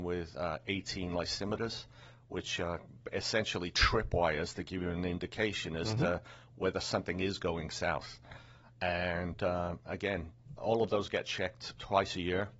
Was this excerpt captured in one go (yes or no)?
yes